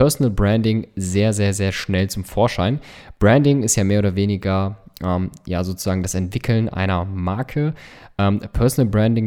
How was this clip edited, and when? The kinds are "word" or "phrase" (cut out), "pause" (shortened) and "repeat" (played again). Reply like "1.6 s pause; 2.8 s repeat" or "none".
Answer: none